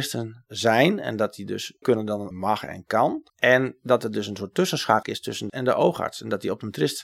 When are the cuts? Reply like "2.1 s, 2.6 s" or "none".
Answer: 1.8 s, 2.3 s, 3.3 s, 5.0 s, 5.5 s